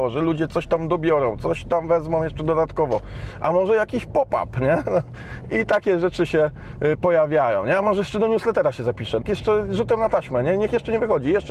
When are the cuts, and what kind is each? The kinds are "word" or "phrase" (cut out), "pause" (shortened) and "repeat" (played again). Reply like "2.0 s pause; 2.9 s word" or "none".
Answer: 9.2 s phrase